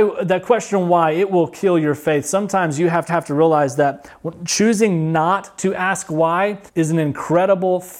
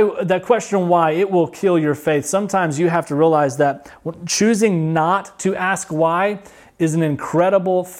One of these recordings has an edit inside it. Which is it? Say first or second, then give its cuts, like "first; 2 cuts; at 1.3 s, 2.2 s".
first; 2 cuts; at 3.1 s, 6.7 s